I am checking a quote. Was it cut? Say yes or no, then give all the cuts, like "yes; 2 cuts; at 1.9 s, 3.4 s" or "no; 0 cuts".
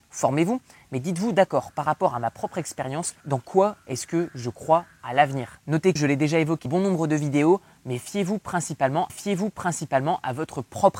yes; 4 cuts; at 3.2 s, 6.0 s, 6.7 s, 9.1 s